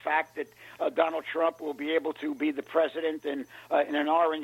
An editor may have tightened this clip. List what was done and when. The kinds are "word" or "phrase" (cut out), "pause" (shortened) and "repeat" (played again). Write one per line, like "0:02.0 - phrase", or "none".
none